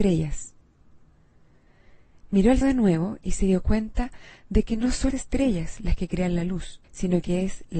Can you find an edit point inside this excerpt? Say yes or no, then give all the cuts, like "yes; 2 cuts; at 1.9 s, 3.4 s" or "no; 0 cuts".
yes; 3 cuts; at 2.6 s, 5.1 s, 6.8 s